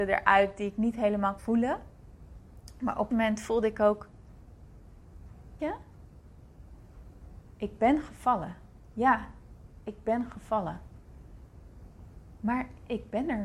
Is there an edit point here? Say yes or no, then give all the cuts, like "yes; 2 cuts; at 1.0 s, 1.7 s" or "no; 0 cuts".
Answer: yes; 3 cuts; at 1.4 s, 3.1 s, 5.6 s